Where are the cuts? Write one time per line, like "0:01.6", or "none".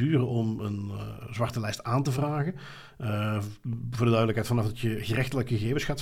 none